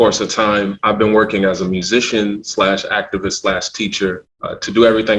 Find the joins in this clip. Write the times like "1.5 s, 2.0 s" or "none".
none